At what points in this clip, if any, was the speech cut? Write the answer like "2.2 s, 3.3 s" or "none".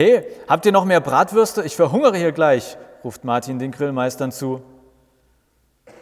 none